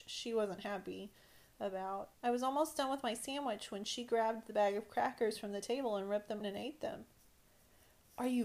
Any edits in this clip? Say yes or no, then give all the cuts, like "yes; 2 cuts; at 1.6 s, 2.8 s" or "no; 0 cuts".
yes; 2 cuts; at 2.1 s, 6.4 s